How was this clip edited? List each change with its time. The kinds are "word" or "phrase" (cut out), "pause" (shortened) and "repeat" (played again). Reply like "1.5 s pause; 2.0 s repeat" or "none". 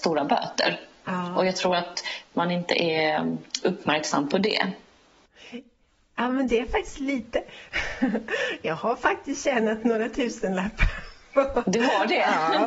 none